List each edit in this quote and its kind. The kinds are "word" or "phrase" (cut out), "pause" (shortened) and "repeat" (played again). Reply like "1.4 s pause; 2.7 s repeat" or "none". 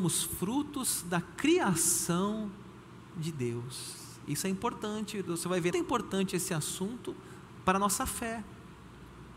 5.7 s phrase